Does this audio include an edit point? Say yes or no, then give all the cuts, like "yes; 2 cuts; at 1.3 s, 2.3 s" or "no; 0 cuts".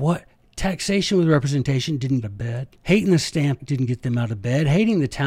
yes; 3 cuts; at 2.2 s, 2.8 s, 3.6 s